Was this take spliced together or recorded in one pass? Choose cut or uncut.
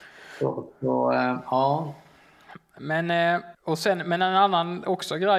cut